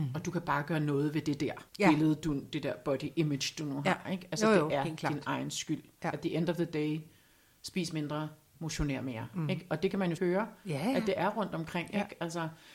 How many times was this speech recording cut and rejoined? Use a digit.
2